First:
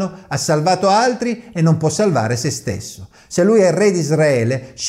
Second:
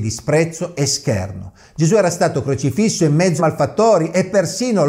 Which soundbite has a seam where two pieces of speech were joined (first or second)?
second